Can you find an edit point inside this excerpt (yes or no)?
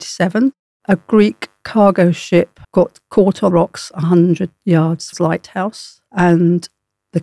yes